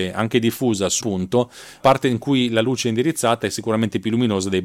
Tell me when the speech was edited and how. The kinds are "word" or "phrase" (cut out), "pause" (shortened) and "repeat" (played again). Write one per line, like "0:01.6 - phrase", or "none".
0:01.0 - word
0:01.8 - word